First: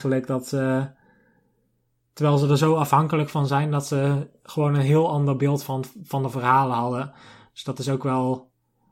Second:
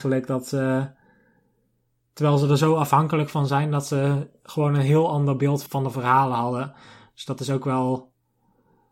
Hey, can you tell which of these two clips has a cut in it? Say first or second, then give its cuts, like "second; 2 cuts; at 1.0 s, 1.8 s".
second; 1 cut; at 5.7 s